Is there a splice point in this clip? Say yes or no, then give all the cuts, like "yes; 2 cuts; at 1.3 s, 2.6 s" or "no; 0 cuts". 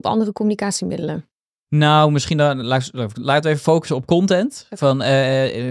no; 0 cuts